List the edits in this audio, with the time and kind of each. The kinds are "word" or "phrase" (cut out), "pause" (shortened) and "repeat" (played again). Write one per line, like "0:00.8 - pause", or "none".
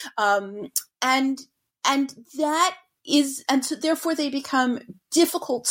none